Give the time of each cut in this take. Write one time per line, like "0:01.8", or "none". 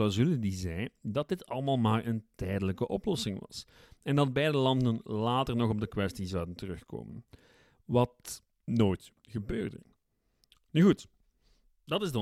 0:08.5